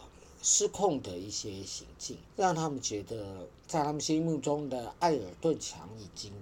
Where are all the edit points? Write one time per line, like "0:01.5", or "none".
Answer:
0:02.3

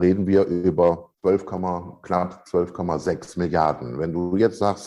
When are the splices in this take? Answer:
0:01.1

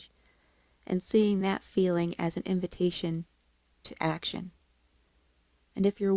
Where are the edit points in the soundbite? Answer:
none

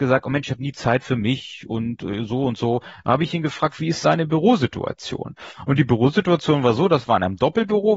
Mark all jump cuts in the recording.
0:04.0

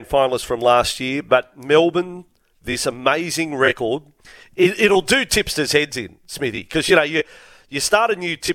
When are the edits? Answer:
none

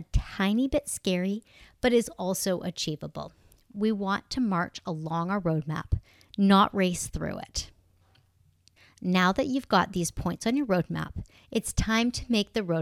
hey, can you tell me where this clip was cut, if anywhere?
none

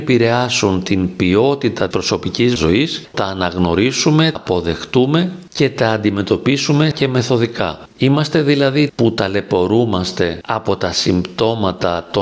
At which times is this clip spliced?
0:01.9
0:02.6
0:03.1
0:04.4
0:06.9
0:08.9

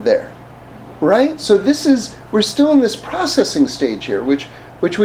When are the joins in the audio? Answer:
none

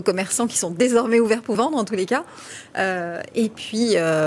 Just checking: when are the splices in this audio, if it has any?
0:01.5

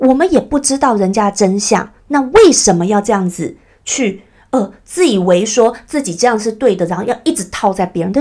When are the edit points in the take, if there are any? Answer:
0:02.0

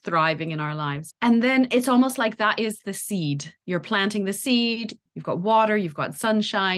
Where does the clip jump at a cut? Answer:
0:03.6

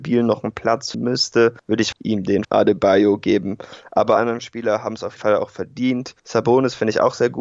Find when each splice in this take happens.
0:00.9
0:01.9
0:02.4
0:04.2
0:05.2

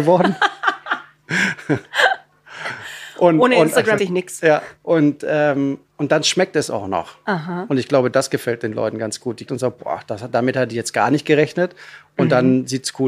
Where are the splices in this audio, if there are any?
0:04.0
0:04.8
0:05.9
0:09.5

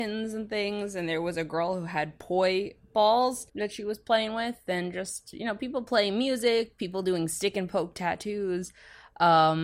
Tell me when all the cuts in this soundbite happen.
0:03.5

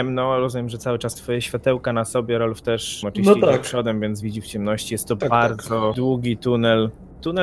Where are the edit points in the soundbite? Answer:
0:01.2
0:03.0
0:04.2

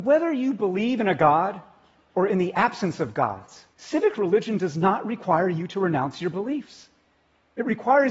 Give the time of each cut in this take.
0:03.7

